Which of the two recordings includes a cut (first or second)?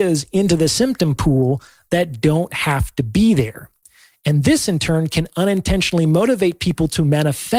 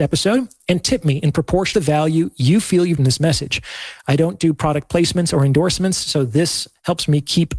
second